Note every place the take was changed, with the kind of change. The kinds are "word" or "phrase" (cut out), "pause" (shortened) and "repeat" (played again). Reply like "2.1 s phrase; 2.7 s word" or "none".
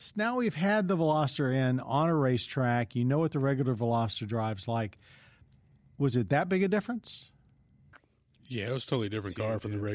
none